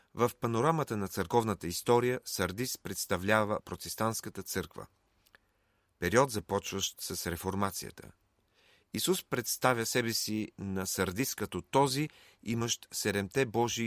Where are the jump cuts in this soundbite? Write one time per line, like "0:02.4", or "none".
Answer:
none